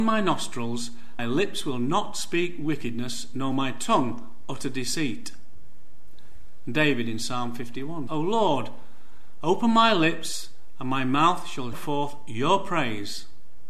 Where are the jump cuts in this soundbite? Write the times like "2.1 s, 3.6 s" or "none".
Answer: 1.2 s, 8.1 s, 11.7 s